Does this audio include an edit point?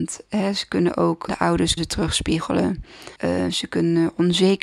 yes; 3 cuts; at 1.3 s, 1.8 s, 3.2 s

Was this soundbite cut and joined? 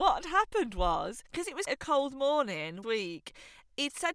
yes; 3 cuts; at 1.2 s, 1.7 s, 2.8 s

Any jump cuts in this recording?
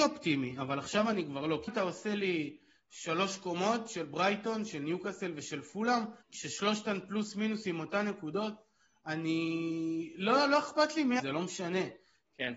yes; 3 cuts; at 1.7 s, 6.2 s, 11.2 s

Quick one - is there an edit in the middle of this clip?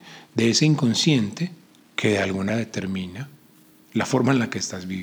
yes; 1 cut; at 2.5 s

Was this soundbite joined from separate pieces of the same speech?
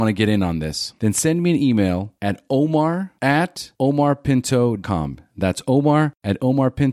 yes; 1 cut; at 4.8 s

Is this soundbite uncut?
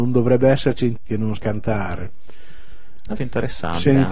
no; 3 cuts; at 1.0 s, 1.4 s, 3.2 s

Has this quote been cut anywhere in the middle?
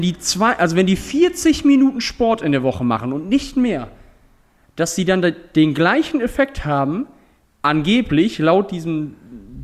no; 0 cuts

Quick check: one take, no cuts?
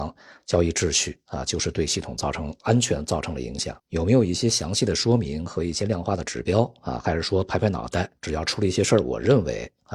no; 2 cuts; at 3.8 s, 8.2 s

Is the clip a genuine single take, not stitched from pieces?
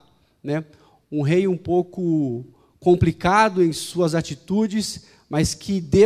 yes; 0 cuts

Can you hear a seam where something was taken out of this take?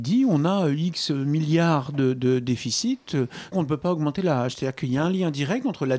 yes; 1 cut; at 3.5 s

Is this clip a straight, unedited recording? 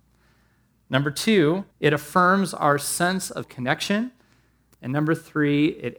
no; 2 cuts; at 1.7 s, 3.4 s

